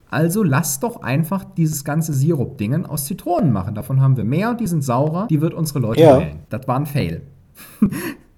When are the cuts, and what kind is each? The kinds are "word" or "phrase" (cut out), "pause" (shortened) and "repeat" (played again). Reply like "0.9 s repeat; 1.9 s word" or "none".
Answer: 6.4 s pause